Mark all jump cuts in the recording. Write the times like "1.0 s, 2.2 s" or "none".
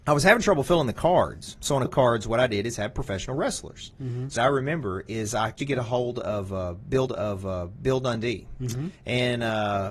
1.9 s, 4.4 s, 5.6 s, 7.1 s, 9.0 s